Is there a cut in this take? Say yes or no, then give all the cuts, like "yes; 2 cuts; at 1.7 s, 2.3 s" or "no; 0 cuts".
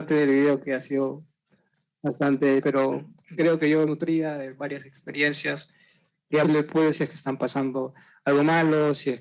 yes; 4 cuts; at 2.6 s, 3.9 s, 6.4 s, 6.9 s